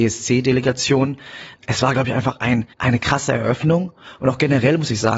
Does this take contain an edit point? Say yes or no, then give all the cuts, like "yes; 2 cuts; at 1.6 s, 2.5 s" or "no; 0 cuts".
yes; 1 cut; at 2.7 s